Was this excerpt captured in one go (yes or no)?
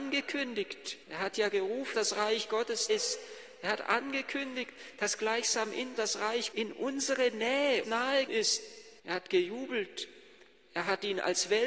no